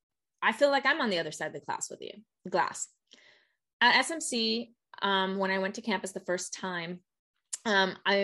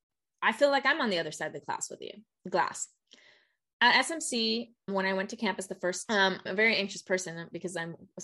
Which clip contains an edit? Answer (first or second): second